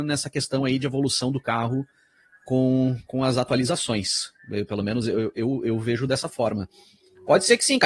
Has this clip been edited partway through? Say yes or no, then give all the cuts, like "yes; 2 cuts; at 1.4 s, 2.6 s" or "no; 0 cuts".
no; 0 cuts